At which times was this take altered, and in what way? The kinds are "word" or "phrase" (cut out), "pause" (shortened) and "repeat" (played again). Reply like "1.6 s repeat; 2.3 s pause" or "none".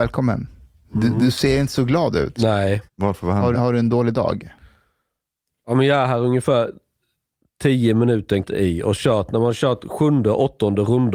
2.9 s pause; 3.5 s word; 8.4 s word